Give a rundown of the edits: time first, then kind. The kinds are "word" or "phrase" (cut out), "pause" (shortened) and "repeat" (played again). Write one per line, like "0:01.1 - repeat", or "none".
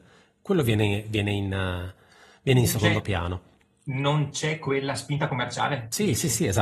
none